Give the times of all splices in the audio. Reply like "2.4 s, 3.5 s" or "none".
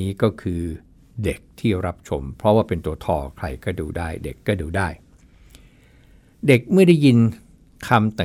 none